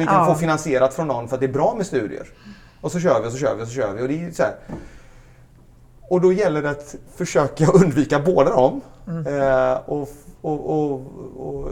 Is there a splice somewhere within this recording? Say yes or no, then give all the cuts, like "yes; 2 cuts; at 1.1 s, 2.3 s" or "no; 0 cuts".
no; 0 cuts